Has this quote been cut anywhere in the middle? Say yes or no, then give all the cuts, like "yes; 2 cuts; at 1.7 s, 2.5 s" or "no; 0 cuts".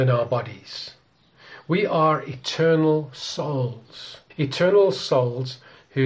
yes; 1 cut; at 4.3 s